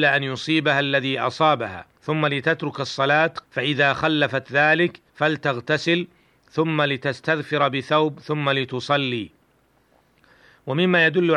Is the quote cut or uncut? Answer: cut